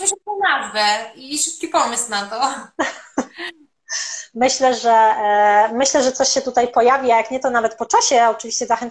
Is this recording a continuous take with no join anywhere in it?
yes; 0 cuts

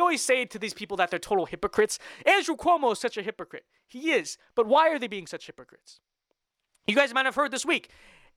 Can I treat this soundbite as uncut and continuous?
yes; 0 cuts

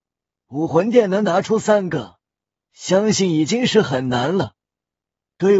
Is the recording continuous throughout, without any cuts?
yes; 0 cuts

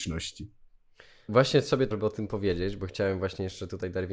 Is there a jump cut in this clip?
yes; 2 cuts; at 1.3 s, 1.9 s

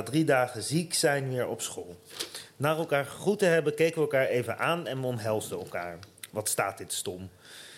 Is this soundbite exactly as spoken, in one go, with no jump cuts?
yes; 0 cuts

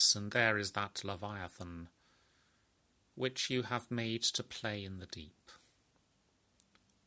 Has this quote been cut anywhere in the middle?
no; 0 cuts

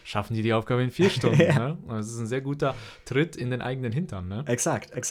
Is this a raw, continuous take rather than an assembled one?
yes; 0 cuts

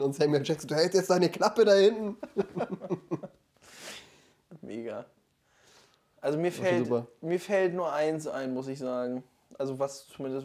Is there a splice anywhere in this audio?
no; 0 cuts

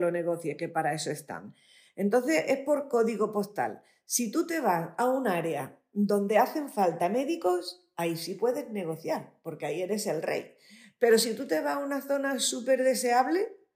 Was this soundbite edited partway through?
no; 0 cuts

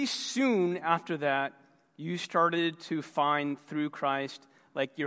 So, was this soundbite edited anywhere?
no; 0 cuts

